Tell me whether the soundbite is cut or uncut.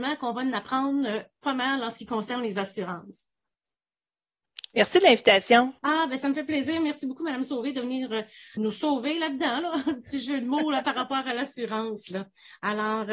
cut